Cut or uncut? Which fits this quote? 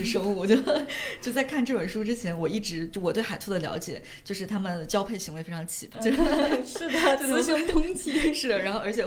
cut